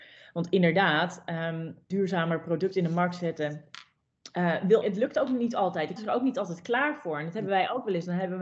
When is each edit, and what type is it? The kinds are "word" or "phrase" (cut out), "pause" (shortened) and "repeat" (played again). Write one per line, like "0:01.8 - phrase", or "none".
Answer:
0:01.9 - word
0:04.8 - word
0:06.0 - word